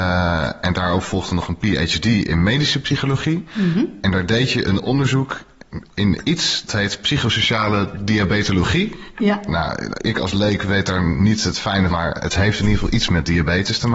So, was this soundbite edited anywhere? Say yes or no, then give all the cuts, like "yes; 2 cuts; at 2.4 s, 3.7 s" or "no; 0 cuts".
yes; 2 cuts; at 6.7 s, 11.9 s